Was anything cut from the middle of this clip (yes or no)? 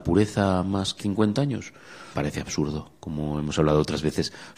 yes